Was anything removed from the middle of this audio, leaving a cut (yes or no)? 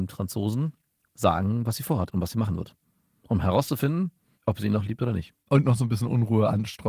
no